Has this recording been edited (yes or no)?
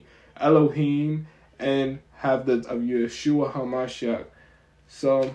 yes